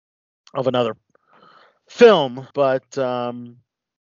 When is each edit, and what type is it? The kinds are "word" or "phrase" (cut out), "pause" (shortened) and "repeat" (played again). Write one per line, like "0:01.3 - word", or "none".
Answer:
0:02.5 - pause